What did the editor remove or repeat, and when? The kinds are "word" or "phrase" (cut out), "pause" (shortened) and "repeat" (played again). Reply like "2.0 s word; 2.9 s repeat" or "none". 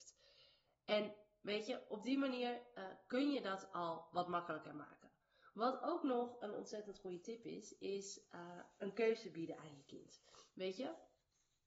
none